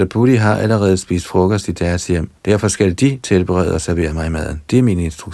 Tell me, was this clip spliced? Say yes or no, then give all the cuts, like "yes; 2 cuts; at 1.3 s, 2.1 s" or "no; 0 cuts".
yes; 1 cut; at 2.4 s